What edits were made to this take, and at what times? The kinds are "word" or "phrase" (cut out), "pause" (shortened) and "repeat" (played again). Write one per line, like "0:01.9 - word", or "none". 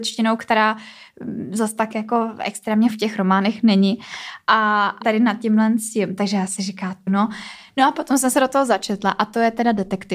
0:02.9 - word
0:05.0 - word
0:06.6 - word
0:07.1 - word